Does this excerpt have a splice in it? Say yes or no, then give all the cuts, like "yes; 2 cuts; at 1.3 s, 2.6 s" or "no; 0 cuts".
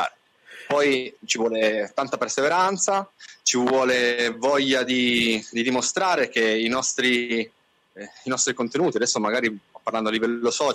no; 0 cuts